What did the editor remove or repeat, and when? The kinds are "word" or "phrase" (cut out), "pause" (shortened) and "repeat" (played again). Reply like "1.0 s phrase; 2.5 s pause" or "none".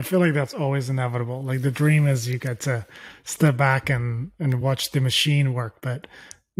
none